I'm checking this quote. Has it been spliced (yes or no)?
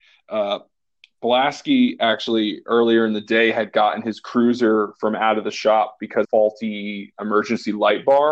yes